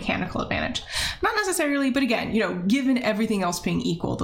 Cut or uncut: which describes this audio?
uncut